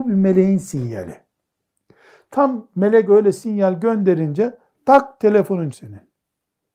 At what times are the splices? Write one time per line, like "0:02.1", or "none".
0:05.7